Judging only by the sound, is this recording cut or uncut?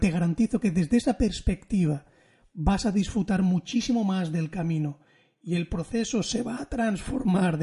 uncut